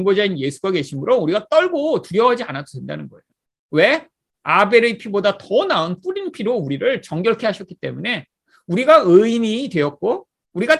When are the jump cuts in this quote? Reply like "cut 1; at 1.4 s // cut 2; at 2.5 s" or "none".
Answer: none